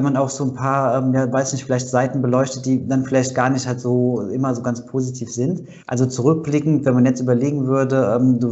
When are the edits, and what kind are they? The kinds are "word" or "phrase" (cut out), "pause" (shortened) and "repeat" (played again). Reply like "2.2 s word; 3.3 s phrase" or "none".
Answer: 5.8 s pause